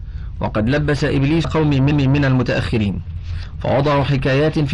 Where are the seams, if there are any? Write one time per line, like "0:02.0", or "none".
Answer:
0:01.4
0:01.9